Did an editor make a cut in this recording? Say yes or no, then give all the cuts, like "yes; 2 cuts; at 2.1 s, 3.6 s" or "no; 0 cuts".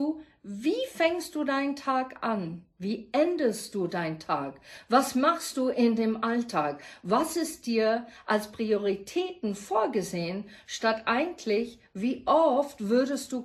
no; 0 cuts